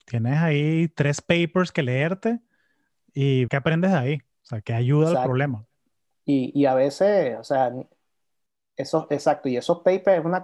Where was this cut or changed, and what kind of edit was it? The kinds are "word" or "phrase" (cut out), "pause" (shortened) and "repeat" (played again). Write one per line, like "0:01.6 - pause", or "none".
0:03.5 - word
0:04.6 - word